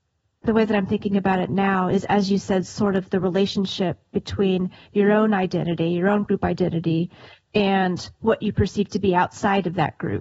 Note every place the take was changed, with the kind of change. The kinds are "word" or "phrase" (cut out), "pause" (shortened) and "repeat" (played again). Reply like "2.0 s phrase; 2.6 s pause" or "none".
none